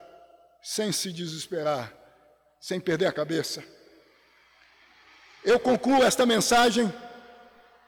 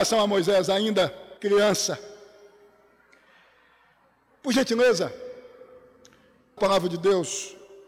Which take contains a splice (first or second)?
second